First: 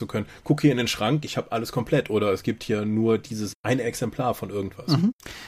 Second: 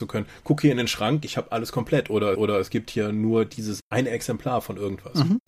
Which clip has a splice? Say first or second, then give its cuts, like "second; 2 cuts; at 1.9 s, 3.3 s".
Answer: second; 1 cut; at 2.3 s